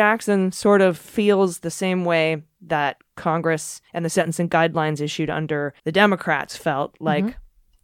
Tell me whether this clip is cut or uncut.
cut